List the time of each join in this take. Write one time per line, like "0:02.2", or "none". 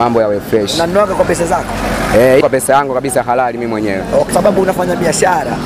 0:02.4
0:04.3